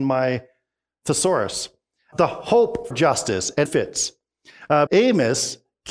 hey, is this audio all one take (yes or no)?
no